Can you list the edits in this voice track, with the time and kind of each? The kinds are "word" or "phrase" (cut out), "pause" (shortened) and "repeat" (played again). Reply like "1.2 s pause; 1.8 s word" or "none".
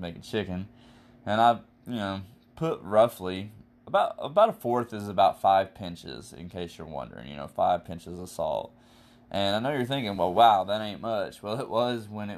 none